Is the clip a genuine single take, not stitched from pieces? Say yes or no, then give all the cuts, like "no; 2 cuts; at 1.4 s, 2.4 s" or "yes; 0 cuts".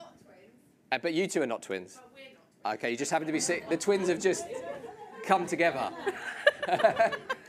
yes; 0 cuts